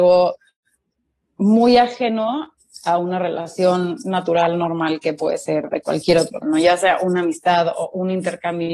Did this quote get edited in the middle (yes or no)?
yes